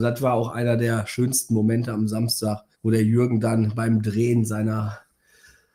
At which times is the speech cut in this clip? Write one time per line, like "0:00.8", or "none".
0:02.7